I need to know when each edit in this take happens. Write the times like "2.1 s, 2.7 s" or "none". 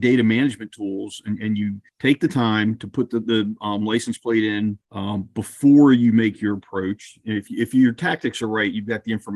1.9 s, 4.8 s